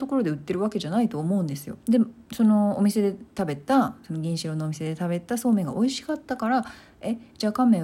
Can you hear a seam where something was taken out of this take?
yes; 1 cut; at 1.8 s

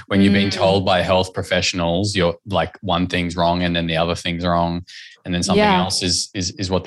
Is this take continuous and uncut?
yes; 0 cuts

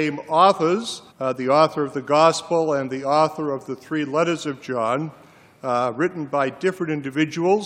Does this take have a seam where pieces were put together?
yes; 1 cut; at 1.1 s

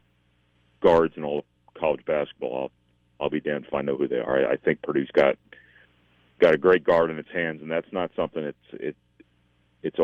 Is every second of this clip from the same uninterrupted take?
yes; 0 cuts

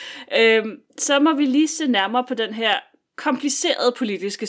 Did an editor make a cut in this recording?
no; 0 cuts

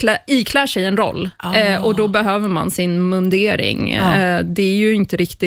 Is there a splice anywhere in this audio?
no; 0 cuts

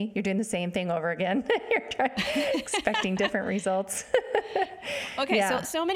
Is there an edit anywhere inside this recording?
no; 0 cuts

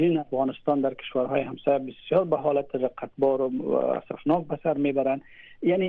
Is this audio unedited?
yes; 0 cuts

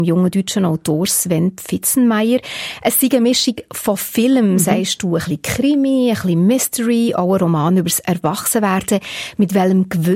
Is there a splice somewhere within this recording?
no; 0 cuts

